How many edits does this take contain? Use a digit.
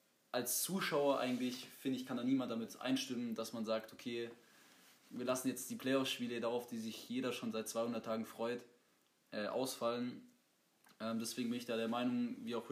0